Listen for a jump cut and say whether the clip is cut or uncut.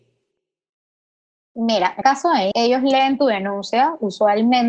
cut